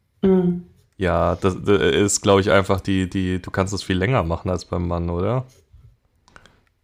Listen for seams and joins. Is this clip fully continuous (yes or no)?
yes